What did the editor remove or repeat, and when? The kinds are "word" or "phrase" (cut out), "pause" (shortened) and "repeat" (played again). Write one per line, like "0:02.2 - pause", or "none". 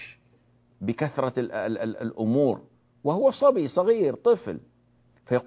none